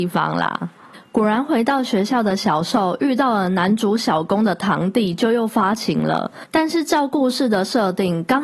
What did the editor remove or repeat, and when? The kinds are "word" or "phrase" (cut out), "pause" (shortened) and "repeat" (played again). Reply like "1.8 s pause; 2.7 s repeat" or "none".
6.5 s pause